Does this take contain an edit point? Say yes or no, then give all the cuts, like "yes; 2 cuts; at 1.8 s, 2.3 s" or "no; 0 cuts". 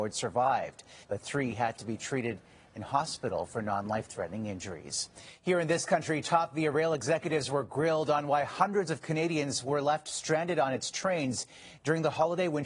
yes; 1 cut; at 1.0 s